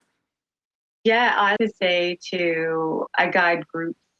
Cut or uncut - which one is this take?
cut